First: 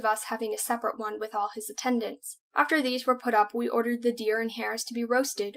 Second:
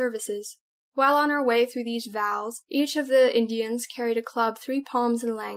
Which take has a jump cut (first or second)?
first